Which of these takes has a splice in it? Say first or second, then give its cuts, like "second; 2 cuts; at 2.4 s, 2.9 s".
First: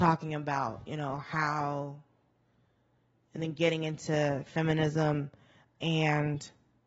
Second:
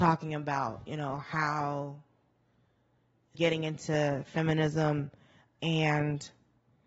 second; 1 cut; at 3.3 s